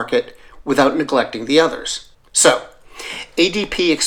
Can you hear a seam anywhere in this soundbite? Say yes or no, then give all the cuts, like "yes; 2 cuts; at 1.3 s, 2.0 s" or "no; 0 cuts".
yes; 1 cut; at 2.1 s